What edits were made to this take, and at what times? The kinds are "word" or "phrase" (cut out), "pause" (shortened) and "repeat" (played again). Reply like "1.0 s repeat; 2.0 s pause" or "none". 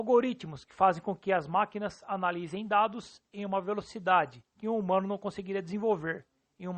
4.5 s pause